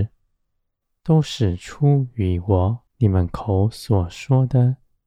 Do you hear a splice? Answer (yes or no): yes